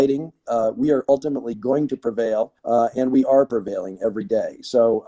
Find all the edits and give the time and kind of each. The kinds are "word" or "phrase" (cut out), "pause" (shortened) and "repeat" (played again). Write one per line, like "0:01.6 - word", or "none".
0:02.6 - pause